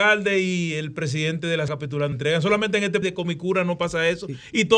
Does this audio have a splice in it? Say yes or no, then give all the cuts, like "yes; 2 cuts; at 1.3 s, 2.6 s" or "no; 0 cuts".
yes; 3 cuts; at 1.7 s, 2.1 s, 3.0 s